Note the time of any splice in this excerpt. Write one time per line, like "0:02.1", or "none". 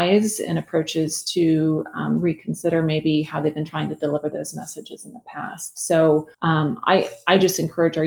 0:06.3